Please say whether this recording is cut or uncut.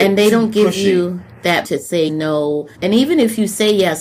cut